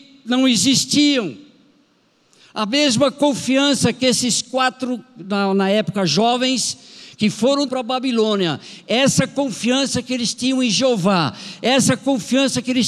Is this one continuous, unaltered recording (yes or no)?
no